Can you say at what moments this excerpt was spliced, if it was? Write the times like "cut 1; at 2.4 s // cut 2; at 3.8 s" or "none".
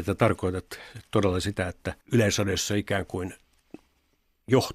cut 1; at 2.0 s